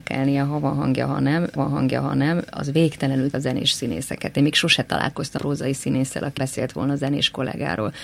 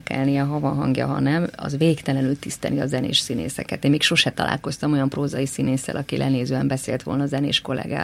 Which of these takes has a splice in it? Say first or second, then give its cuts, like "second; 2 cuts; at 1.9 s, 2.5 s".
first; 4 cuts; at 1.6 s, 3.3 s, 5.4 s, 6.4 s